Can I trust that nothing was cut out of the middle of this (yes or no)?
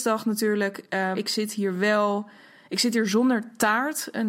no